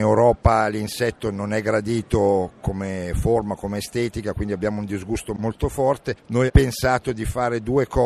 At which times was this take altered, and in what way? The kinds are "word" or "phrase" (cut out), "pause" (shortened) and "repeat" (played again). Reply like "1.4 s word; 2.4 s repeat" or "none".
6.5 s word